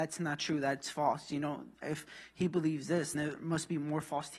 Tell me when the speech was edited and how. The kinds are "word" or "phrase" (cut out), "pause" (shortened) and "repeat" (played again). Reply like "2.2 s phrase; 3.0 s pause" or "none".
1.8 s word; 3.1 s word